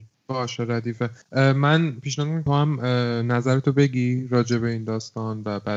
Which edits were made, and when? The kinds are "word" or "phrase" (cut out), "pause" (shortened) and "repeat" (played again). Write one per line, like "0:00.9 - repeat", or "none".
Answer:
0:01.2 - pause
0:02.5 - phrase